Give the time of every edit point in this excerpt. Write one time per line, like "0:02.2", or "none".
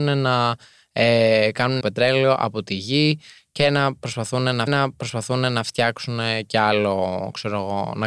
0:01.8
0:04.7